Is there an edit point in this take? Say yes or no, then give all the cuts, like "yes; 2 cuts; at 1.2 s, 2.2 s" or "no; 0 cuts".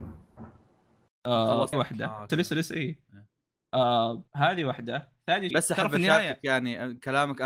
yes; 4 cuts; at 1.7 s, 2.3 s, 4.3 s, 5.5 s